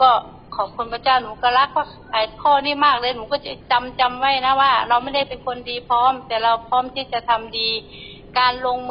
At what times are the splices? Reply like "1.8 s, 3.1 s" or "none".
3.6 s